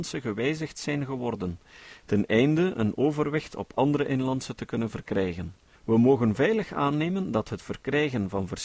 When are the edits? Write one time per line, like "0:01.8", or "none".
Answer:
0:05.7

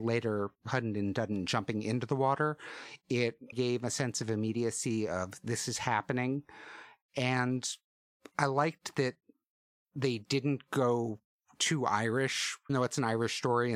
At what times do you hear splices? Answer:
0:03.5
0:12.7

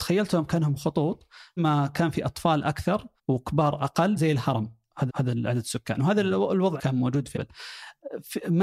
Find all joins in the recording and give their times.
0:01.6
0:03.2
0:04.2
0:05.1
0:06.8
0:07.3

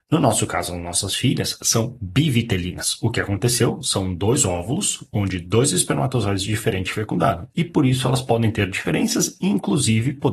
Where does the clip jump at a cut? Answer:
none

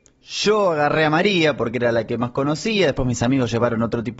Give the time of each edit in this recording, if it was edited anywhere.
none

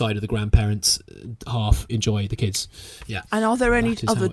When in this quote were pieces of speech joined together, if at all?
0:01.9
0:03.3

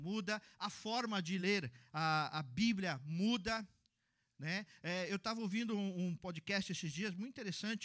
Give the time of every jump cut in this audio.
none

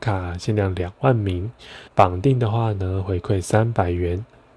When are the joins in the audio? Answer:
0:01.9

